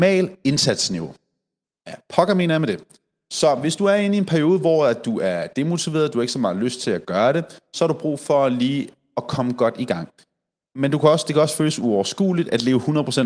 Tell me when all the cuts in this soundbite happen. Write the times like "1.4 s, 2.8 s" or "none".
none